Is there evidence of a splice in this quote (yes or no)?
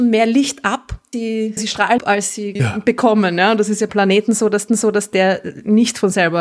yes